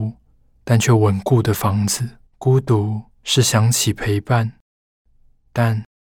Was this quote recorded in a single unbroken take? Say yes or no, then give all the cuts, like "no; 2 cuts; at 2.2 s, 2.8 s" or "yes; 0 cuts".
no; 2 cuts; at 2.3 s, 3.2 s